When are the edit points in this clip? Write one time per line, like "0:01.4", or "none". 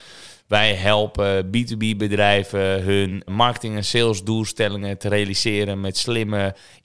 0:03.3